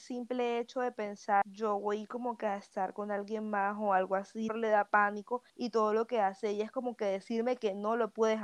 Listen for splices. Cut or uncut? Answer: cut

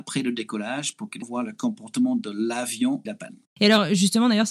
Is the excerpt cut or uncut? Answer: cut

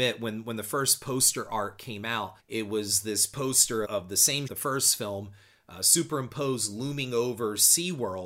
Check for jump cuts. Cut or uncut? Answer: cut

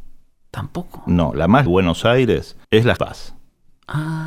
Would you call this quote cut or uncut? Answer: cut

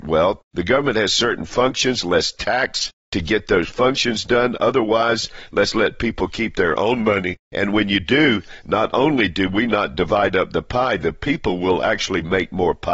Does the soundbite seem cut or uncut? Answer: uncut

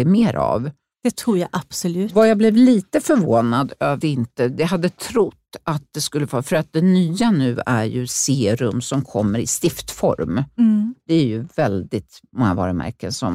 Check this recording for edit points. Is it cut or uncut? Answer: cut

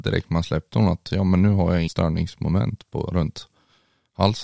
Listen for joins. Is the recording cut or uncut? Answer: cut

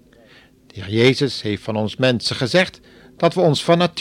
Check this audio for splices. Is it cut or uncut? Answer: uncut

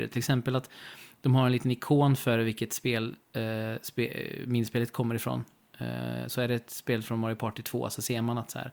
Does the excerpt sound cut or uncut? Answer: uncut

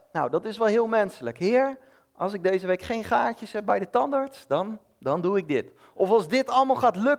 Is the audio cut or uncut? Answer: uncut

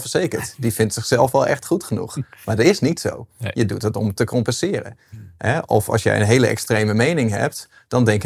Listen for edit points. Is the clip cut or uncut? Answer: uncut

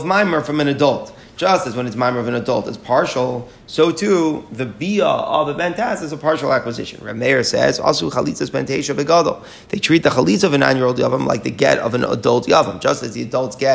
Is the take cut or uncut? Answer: uncut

